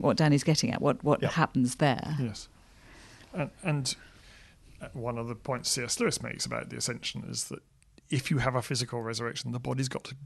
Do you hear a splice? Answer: no; 0 cuts

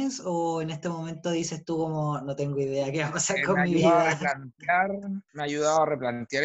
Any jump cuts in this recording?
no; 0 cuts

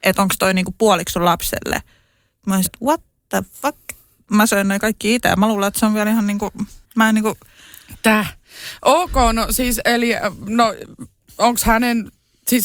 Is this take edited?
yes; 2 cuts; at 2.7 s, 6.8 s

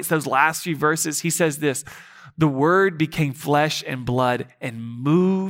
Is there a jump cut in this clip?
no; 0 cuts

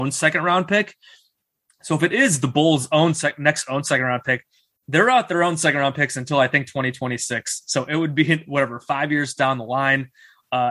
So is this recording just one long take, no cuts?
yes; 0 cuts

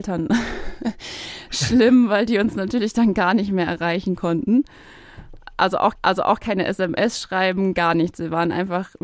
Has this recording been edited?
yes; 1 cut; at 5.9 s

